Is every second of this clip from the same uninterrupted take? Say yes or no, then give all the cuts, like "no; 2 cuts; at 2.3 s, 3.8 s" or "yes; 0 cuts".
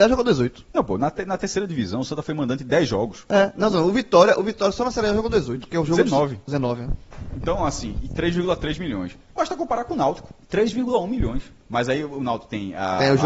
no; 3 cuts; at 9.2 s, 10.4 s, 11.6 s